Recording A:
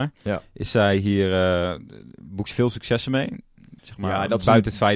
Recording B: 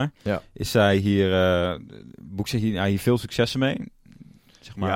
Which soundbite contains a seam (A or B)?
A